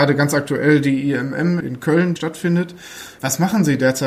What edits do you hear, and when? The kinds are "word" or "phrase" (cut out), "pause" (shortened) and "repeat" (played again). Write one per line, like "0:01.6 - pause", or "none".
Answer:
0:01.6 - word
0:02.2 - word